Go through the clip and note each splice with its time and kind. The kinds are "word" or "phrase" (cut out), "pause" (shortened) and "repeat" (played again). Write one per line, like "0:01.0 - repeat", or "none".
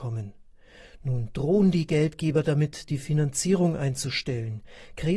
none